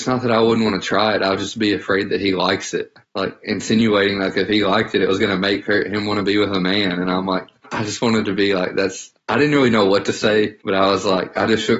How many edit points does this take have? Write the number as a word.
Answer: one